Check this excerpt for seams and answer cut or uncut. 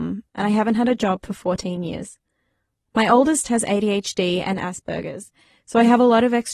uncut